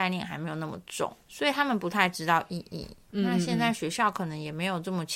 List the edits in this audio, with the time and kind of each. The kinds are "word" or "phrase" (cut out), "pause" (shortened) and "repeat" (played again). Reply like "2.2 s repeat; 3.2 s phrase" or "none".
1.3 s word